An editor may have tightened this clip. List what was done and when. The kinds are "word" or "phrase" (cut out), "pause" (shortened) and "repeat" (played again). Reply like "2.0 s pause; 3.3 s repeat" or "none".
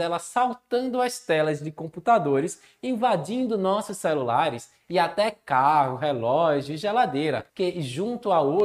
7.5 s pause